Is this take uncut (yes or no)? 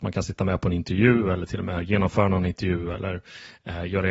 yes